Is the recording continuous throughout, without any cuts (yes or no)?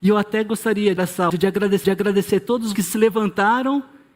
no